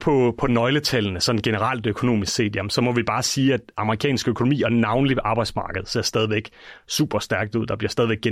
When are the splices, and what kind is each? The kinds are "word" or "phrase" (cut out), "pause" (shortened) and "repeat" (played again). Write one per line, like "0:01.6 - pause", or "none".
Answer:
none